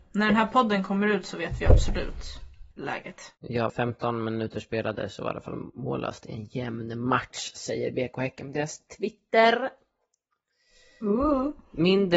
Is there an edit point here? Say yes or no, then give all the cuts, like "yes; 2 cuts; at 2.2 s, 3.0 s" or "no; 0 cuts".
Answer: yes; 2 cuts; at 2.7 s, 3.7 s